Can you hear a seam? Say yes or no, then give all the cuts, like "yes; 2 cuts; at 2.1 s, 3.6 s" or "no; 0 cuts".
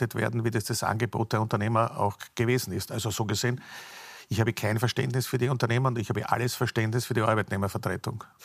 no; 0 cuts